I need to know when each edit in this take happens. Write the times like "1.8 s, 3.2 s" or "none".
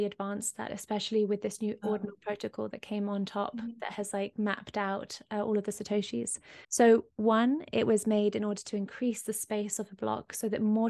6.6 s